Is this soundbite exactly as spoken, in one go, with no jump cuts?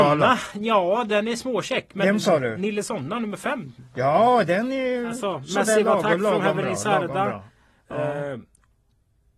yes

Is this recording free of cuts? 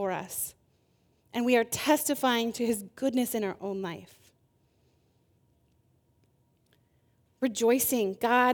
yes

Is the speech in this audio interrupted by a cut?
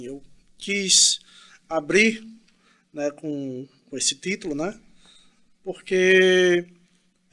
no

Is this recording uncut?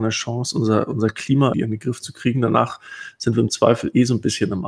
no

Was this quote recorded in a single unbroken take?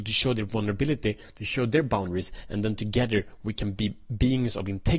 yes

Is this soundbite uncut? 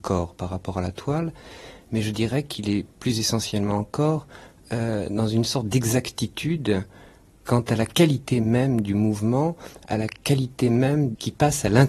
yes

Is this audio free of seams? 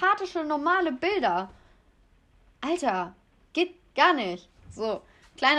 yes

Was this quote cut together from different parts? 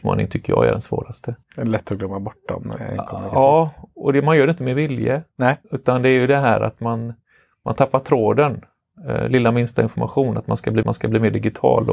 yes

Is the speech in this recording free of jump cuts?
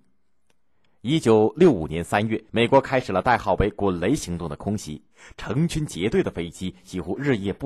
no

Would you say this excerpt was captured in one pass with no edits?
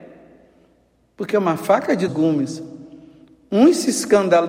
no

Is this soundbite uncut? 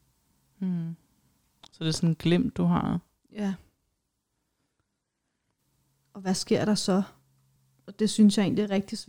yes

